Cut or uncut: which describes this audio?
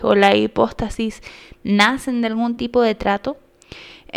uncut